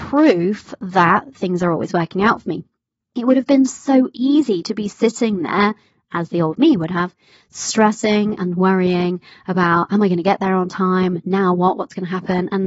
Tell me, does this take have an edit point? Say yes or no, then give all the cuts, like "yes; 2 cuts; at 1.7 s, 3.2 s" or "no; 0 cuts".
no; 0 cuts